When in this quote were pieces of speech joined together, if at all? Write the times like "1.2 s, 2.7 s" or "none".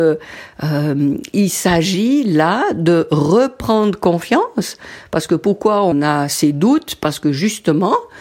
5.9 s